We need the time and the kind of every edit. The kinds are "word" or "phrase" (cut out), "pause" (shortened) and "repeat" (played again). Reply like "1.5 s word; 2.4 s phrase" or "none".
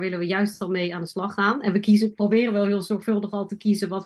none